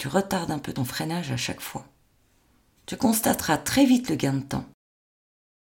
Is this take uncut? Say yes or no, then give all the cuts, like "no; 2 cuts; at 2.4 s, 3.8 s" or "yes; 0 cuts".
yes; 0 cuts